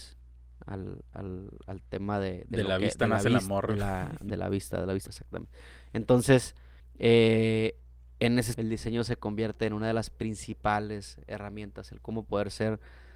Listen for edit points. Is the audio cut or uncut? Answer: cut